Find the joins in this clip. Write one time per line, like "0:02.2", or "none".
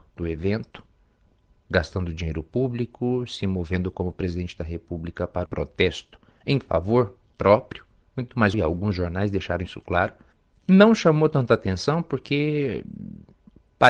0:05.4
0:08.5
0:10.3